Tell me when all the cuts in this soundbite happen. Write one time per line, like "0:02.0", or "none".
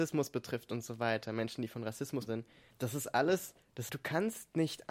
0:02.3
0:02.7
0:03.9